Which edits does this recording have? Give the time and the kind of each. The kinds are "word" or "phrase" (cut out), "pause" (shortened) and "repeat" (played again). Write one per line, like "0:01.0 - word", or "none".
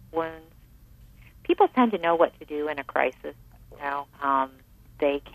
0:03.4 - pause
0:04.1 - pause